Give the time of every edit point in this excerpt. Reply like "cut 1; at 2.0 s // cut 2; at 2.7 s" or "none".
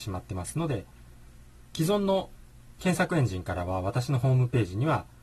cut 1; at 2.7 s